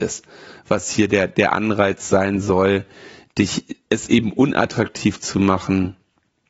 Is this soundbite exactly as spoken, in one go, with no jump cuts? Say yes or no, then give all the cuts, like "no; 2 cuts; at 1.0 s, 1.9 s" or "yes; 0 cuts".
yes; 0 cuts